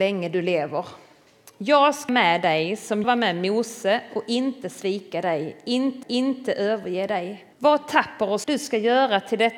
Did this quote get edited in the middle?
yes; 5 cuts; at 2.1 s, 3.0 s, 6.0 s, 7.5 s, 8.4 s

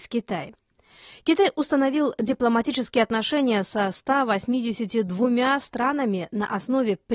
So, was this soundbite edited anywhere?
no; 0 cuts

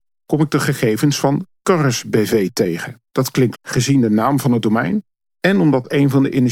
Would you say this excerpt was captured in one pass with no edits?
no; 2 cuts; at 3.1 s, 3.5 s

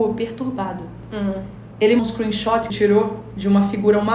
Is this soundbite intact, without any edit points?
no; 2 cuts; at 2.0 s, 2.7 s

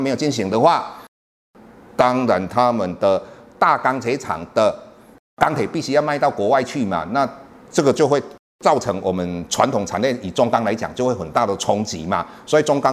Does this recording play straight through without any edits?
yes; 0 cuts

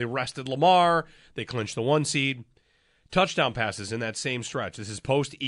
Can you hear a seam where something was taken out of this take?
no; 0 cuts

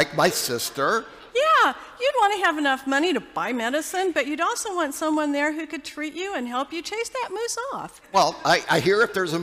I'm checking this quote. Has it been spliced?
yes; 1 cut; at 1.3 s

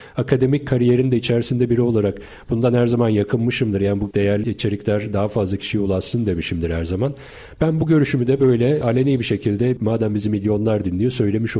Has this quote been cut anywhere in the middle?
no; 0 cuts

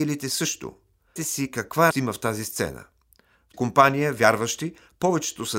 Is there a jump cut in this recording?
yes; 3 cuts; at 1.2 s, 1.9 s, 3.5 s

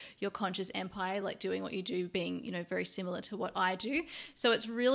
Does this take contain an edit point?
no; 0 cuts

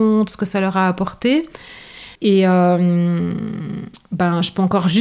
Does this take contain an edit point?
yes; 1 cut; at 2.1 s

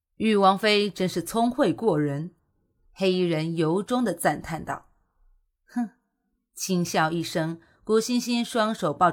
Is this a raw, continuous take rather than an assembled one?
yes; 0 cuts

